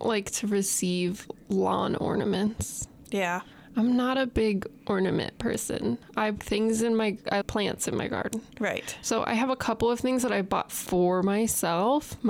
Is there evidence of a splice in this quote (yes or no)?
yes